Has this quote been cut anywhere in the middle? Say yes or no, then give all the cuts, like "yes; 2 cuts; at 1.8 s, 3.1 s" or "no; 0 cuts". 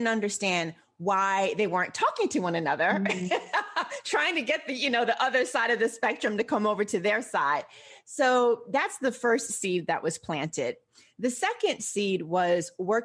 no; 0 cuts